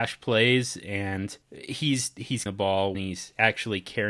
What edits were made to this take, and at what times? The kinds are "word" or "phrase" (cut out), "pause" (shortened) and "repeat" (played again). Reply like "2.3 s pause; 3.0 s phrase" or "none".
1.4 s pause; 2.5 s word; 2.9 s phrase